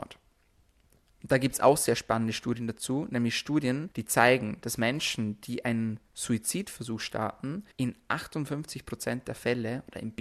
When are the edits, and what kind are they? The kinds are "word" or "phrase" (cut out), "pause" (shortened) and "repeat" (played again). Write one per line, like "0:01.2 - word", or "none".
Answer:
0:03.9 - pause
0:07.7 - pause